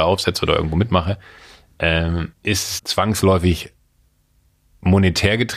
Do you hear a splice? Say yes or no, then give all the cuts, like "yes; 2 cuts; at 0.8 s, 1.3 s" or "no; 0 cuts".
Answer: yes; 2 cuts; at 2.3 s, 2.8 s